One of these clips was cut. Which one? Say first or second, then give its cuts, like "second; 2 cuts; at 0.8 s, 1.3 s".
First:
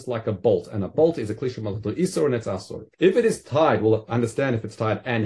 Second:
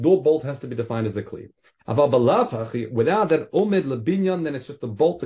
first; 1 cut; at 2.9 s